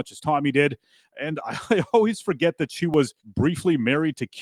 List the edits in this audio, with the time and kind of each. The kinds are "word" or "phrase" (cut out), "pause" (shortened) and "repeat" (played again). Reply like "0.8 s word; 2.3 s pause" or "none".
3.2 s pause